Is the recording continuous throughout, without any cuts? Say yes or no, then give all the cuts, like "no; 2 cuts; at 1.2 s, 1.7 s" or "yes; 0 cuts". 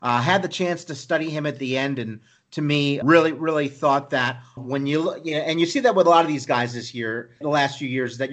no; 3 cuts; at 3.0 s, 4.6 s, 7.4 s